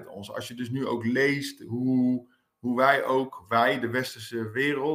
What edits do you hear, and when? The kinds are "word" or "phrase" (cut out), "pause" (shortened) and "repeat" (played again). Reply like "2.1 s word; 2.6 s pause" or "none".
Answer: none